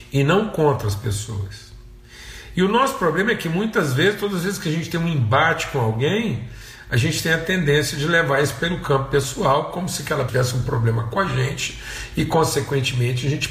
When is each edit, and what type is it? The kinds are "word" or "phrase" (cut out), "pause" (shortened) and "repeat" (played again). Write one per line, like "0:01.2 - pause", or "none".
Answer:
0:10.3 - word